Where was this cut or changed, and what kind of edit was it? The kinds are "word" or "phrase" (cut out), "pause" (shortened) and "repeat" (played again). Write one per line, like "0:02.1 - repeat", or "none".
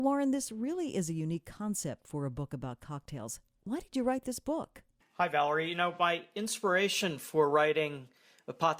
none